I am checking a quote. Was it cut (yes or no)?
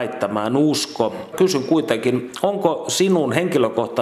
yes